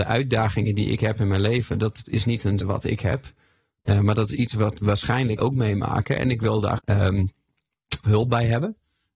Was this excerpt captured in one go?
no; 5 cuts; at 2.1 s, 2.6 s, 5.4 s, 6.8 s, 8.0 s

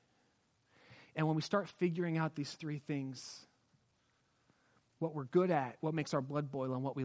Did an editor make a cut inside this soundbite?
no; 0 cuts

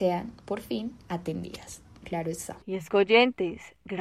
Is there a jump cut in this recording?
yes; 2 cuts; at 2.0 s, 2.6 s

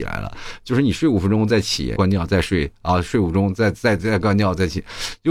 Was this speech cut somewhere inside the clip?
yes; 1 cut; at 2.0 s

